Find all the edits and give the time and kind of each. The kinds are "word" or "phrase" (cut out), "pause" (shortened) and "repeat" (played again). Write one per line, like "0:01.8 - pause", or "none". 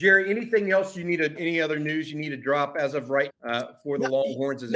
0:01.4 - word
0:03.3 - word